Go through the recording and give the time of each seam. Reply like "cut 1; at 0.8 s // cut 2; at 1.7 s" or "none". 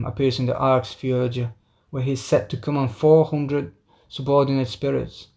none